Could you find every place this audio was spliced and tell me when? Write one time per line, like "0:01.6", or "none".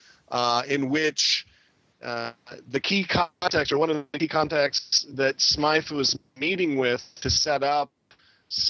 none